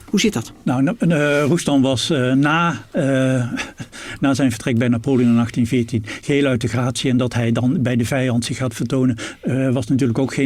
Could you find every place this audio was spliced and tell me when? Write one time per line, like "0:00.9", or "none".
none